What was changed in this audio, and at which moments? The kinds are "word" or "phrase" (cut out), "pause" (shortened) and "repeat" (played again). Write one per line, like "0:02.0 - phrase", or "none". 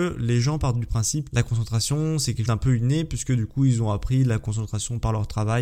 0:01.3 - word
0:02.5 - word